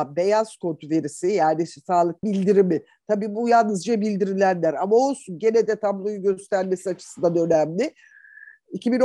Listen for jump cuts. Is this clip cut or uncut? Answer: cut